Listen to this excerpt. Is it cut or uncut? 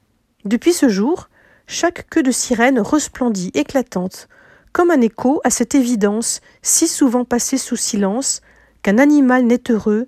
uncut